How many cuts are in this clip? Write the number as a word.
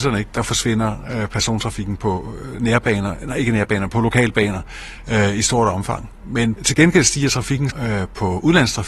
two